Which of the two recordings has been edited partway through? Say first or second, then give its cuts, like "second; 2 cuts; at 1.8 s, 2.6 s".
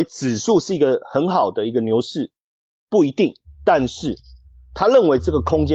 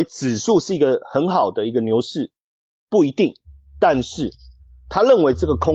first; 1 cut; at 3.5 s